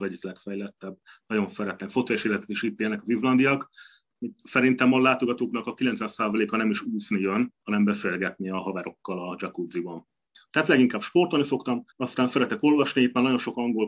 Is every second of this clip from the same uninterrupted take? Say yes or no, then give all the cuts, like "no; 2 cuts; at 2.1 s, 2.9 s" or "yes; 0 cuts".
no; 3 cuts; at 7.6 s, 10.4 s, 11.9 s